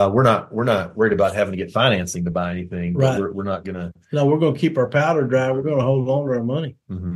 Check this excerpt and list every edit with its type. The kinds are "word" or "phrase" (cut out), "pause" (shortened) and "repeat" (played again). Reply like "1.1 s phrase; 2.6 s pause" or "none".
none